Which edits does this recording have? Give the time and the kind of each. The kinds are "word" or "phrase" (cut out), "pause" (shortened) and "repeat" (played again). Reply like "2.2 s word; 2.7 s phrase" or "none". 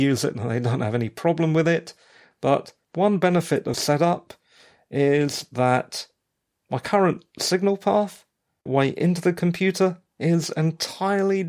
3.7 s word; 8.7 s word

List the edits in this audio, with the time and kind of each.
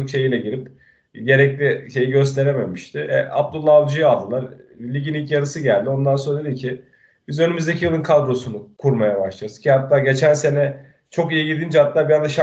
none

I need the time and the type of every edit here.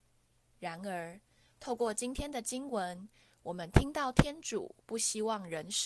none

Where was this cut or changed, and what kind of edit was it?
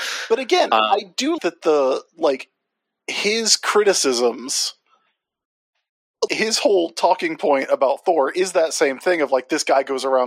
1.4 s word; 6.3 s word

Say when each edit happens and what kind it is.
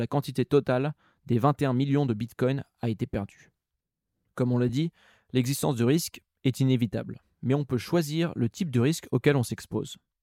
none

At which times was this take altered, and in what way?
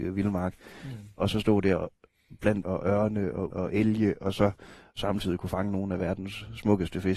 2.6 s word; 3.5 s word

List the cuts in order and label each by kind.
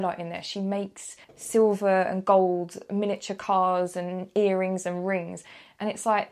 1.2 s pause

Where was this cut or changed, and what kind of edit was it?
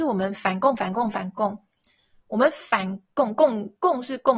none

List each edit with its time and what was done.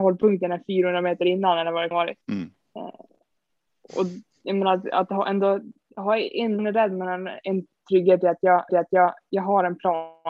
1.9 s phrase; 2.2 s pause; 6.6 s phrase; 8.7 s repeat

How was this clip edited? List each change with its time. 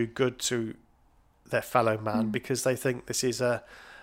none

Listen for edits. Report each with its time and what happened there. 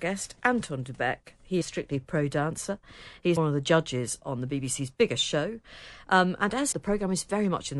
1.6 s phrase; 3.4 s word; 6.7 s word

